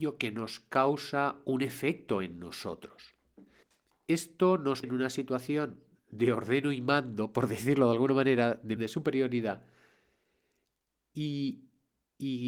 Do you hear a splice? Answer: yes; 4 cuts; at 3.6 s, 4.8 s, 6.0 s, 8.8 s

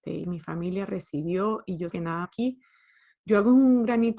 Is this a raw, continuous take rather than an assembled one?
no; 2 cuts; at 1.9 s, 2.2 s

